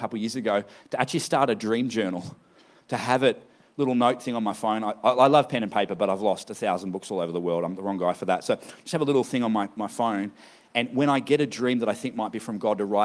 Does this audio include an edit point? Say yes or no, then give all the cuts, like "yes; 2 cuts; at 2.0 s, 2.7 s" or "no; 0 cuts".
no; 0 cuts